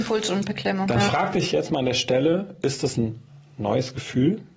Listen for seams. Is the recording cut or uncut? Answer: uncut